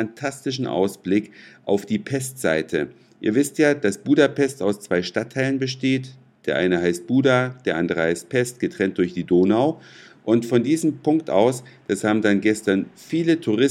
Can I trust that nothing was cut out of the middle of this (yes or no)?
yes